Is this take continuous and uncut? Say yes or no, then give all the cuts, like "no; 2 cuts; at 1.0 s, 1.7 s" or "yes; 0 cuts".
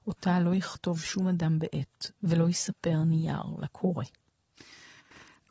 yes; 0 cuts